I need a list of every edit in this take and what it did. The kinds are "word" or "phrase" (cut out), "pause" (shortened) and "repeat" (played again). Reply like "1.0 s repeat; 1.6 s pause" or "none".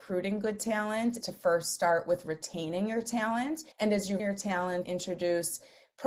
1.2 s word; 3.7 s pause; 4.2 s word; 4.8 s word